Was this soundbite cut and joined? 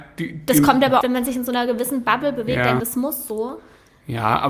yes; 2 cuts; at 1.0 s, 2.8 s

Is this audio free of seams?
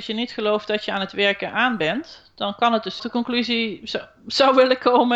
no; 1 cut; at 3.0 s

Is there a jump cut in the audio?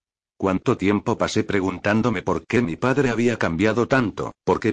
no; 0 cuts

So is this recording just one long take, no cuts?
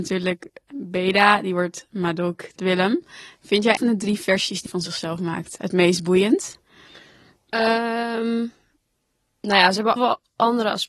no; 5 cuts; at 2.6 s, 3.8 s, 4.7 s, 5.6 s, 10.0 s

